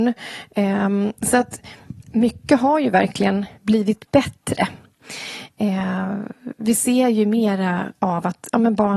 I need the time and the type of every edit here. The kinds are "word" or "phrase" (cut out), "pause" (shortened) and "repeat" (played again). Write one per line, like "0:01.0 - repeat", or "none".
0:03.6 - pause